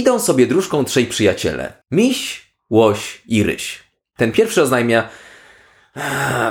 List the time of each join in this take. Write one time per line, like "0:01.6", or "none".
0:01.8